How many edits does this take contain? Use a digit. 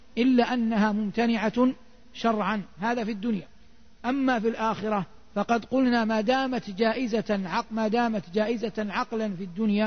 1